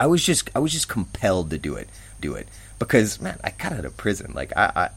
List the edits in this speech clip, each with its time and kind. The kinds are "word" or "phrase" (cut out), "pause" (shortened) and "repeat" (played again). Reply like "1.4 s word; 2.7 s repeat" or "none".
2.2 s repeat